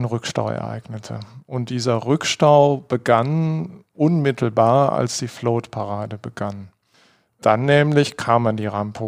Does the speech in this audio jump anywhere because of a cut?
no; 0 cuts

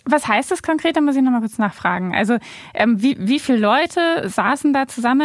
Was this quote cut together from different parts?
no; 0 cuts

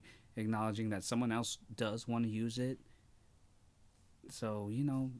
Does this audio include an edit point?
no; 0 cuts

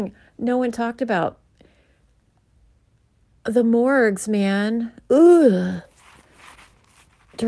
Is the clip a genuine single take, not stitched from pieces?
yes; 0 cuts

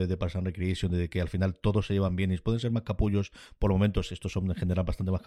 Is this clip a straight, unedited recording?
yes; 0 cuts

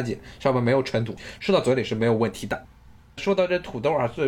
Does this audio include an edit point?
no; 0 cuts

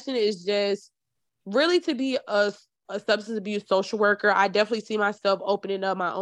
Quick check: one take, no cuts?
yes; 0 cuts

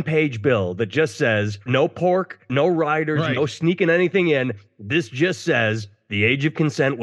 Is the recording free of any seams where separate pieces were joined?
no; 2 cuts; at 1.7 s, 2.5 s

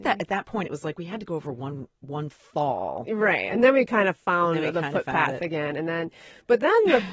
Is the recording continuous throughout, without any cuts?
yes; 0 cuts

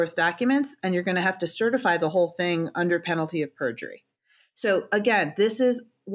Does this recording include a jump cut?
no; 0 cuts

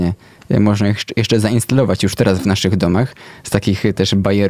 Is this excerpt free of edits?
yes; 0 cuts

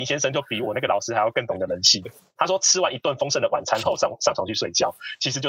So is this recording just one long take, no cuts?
yes; 0 cuts

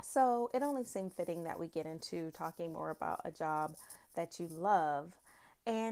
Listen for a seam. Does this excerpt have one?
no; 0 cuts

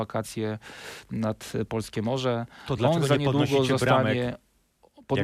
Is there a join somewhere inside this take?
no; 0 cuts

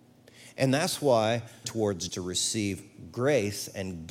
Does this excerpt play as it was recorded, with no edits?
no; 2 cuts; at 1.6 s, 2.1 s

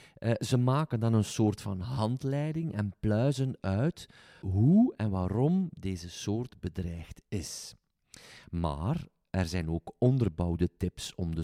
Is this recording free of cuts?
no; 1 cut; at 4.4 s

